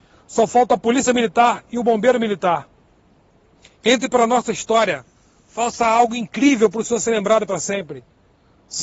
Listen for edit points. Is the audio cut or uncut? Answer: uncut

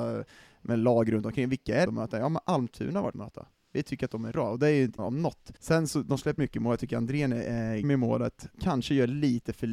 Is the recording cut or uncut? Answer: cut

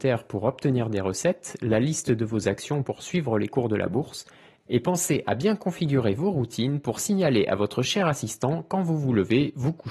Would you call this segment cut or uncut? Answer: uncut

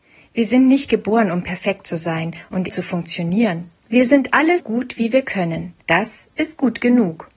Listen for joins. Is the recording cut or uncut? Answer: cut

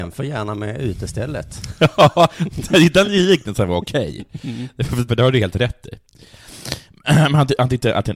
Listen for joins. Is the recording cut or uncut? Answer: cut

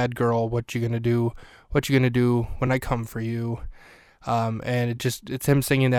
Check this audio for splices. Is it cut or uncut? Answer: uncut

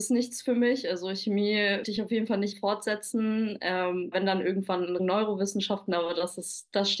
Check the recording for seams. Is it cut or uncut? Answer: cut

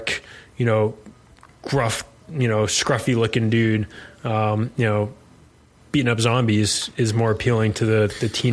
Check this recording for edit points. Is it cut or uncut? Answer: uncut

